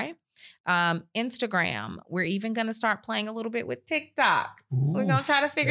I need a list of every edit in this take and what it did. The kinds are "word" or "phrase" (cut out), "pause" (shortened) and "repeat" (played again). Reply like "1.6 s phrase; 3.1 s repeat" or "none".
none